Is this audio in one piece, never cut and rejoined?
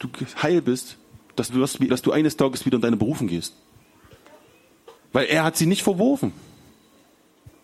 no; 3 cuts; at 1.5 s, 1.9 s, 5.0 s

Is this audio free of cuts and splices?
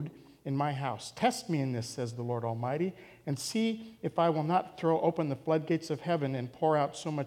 yes; 0 cuts

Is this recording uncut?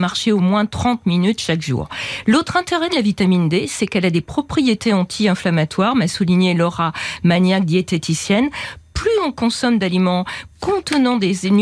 yes; 0 cuts

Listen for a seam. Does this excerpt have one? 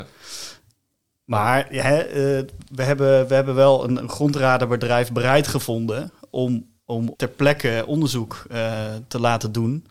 yes; 2 cuts; at 4.0 s, 7.1 s

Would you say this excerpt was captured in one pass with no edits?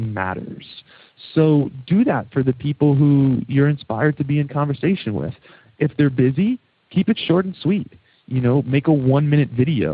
yes; 0 cuts

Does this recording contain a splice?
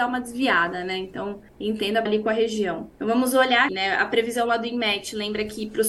yes; 4 cuts; at 1.5 s, 2.1 s, 2.9 s, 3.7 s

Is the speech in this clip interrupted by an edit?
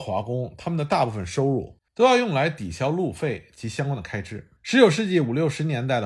yes; 2 cuts; at 1.9 s, 4.6 s

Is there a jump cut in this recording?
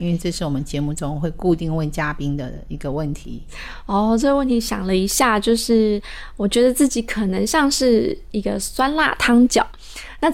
no; 0 cuts

